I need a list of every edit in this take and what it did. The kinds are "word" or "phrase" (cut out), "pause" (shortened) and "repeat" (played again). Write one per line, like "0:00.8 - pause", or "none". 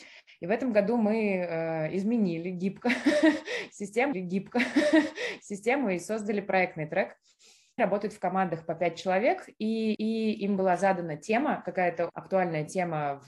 0:04.1 - repeat
0:07.8 - phrase
0:09.9 - repeat
0:12.1 - word